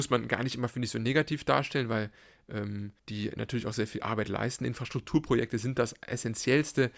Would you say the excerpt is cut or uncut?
cut